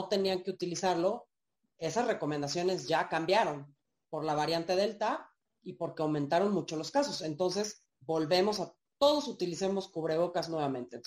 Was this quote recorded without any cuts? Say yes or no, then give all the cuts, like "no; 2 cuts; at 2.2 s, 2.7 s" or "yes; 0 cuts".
yes; 0 cuts